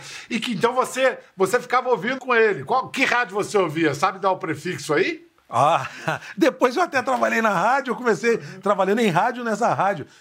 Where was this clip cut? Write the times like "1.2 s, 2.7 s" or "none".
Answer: 2.2 s, 5.4 s